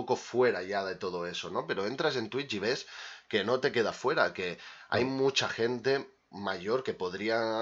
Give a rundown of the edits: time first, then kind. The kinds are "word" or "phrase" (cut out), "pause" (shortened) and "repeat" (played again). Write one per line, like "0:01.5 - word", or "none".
none